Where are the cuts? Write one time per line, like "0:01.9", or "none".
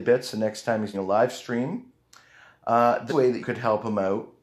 0:00.9
0:03.1
0:03.4